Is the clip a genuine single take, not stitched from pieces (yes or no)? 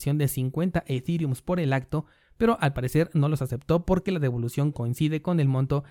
yes